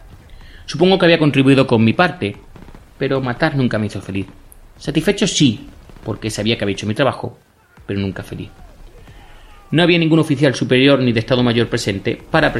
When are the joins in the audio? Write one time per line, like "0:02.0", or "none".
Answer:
none